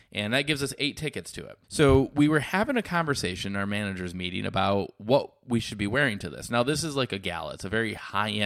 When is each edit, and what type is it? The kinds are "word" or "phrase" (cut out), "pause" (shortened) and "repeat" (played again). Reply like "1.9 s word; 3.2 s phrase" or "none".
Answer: 1.6 s pause